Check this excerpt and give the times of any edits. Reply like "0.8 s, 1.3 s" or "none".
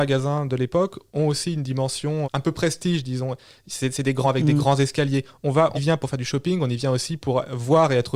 2.2 s, 4.2 s, 5.7 s